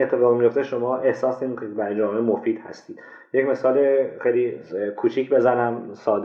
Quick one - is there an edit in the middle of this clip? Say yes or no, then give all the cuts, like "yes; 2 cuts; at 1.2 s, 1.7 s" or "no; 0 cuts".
no; 0 cuts